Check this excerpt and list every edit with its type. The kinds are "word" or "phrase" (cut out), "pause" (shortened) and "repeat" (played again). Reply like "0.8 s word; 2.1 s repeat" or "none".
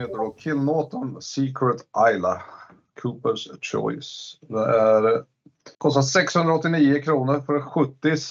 5.7 s pause